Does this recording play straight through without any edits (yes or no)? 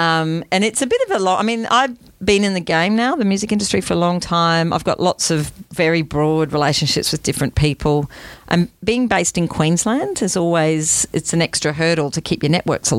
yes